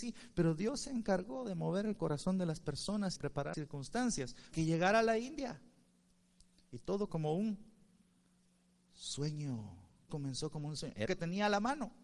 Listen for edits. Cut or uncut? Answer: cut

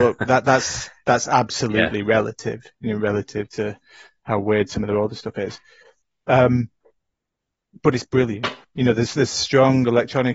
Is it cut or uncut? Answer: uncut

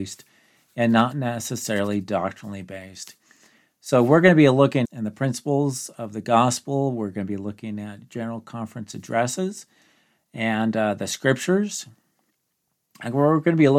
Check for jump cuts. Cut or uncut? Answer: cut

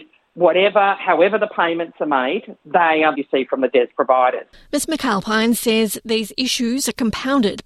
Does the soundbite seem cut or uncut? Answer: cut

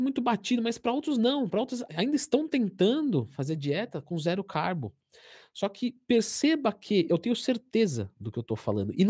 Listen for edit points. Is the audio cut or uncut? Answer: cut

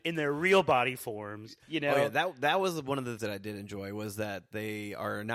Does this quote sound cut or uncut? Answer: cut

